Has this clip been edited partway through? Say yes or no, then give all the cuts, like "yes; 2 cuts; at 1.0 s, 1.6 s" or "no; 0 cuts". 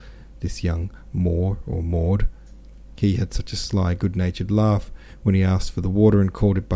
no; 0 cuts